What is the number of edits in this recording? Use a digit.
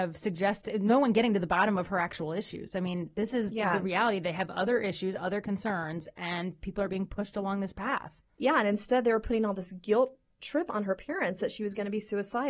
0